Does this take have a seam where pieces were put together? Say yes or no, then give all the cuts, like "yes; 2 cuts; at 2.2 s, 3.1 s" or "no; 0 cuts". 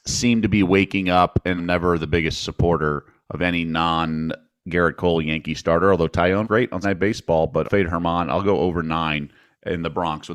yes; 4 cuts; at 1.6 s, 6.4 s, 6.8 s, 7.6 s